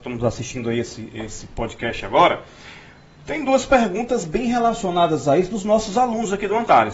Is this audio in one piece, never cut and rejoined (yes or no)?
yes